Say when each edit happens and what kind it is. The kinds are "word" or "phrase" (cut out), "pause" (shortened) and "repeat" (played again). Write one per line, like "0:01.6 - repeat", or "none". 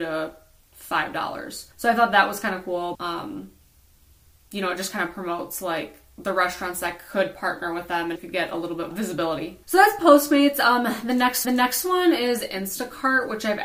0:01.7 - pause
0:02.9 - word
0:08.2 - word
0:08.9 - phrase
0:09.6 - pause
0:11.4 - repeat